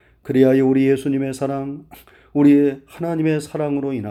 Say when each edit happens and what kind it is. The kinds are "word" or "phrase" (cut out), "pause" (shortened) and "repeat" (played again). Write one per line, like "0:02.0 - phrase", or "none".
none